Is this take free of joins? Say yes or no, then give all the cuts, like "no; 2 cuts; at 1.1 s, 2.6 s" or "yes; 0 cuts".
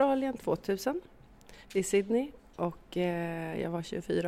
no; 1 cut; at 1.6 s